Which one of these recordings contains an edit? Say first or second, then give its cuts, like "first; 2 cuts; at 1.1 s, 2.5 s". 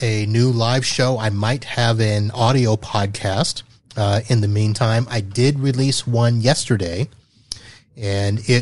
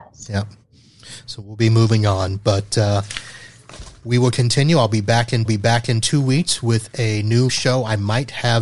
second; 2 cuts; at 5.4 s, 7.5 s